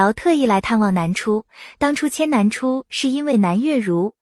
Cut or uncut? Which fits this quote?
uncut